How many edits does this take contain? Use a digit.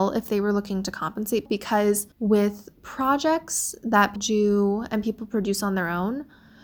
3